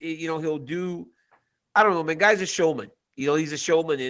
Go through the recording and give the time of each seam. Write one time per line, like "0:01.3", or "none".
none

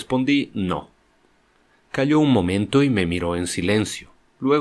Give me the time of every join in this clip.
none

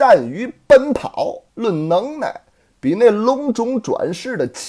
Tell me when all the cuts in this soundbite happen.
0:01.5

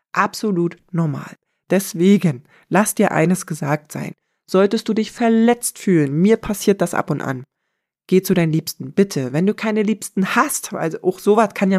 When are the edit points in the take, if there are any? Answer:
none

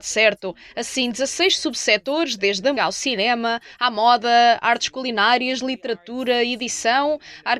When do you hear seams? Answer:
0:02.8

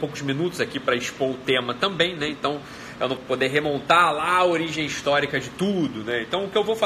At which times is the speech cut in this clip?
0:03.2

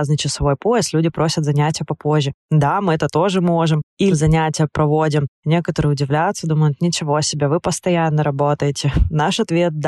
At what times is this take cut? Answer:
0:04.1

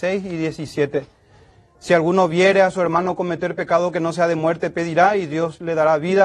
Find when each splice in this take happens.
none

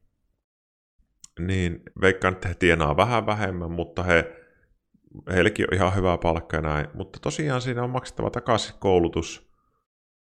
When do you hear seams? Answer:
0:01.9

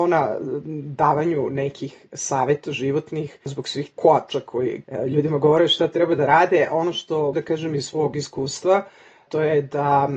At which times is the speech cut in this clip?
0:03.9
0:07.3
0:08.1

